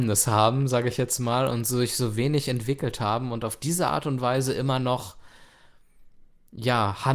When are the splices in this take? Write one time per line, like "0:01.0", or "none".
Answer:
none